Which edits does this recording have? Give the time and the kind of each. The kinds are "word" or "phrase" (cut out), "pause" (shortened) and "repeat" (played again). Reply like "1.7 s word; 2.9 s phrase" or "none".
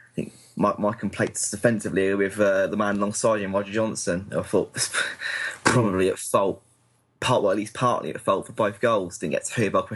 none